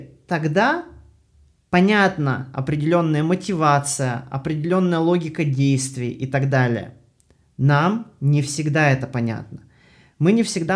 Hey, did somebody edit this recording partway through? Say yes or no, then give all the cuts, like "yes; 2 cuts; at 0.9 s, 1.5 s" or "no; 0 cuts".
no; 0 cuts